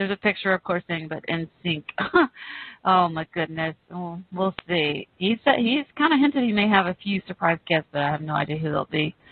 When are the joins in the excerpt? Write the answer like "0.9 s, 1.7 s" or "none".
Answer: 1.2 s, 4.3 s